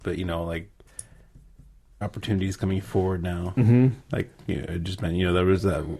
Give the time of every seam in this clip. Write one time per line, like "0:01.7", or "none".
0:02.0
0:04.0